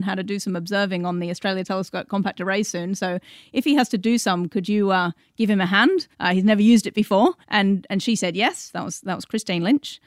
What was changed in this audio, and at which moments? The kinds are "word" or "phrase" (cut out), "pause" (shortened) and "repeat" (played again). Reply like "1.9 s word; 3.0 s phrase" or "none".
6.1 s pause; 7.4 s pause